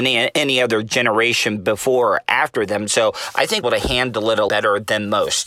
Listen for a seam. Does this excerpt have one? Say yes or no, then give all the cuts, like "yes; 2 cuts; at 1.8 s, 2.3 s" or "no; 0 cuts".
yes; 2 cuts; at 3.6 s, 4.5 s